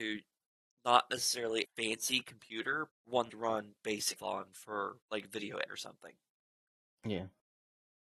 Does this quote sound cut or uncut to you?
cut